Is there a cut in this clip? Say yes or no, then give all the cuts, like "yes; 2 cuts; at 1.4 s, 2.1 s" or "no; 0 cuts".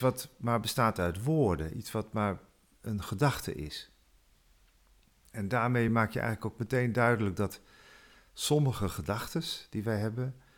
no; 0 cuts